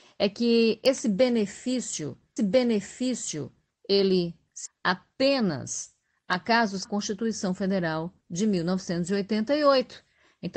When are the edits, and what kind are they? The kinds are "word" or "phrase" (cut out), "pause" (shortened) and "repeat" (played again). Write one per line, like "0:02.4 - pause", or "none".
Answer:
0:02.4 - repeat
0:04.7 - word
0:06.8 - phrase
0:08.2 - pause